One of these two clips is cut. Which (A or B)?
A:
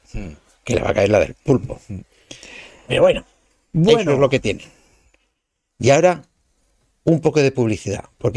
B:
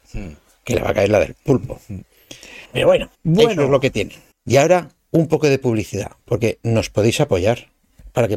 B